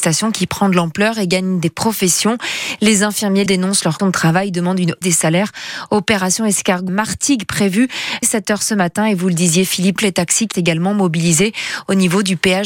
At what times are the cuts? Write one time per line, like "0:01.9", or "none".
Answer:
0:03.5
0:04.0
0:05.0
0:06.9
0:08.2
0:10.0
0:10.5

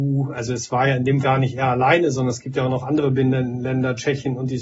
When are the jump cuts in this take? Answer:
0:01.2

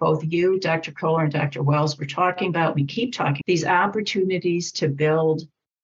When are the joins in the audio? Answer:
0:03.4

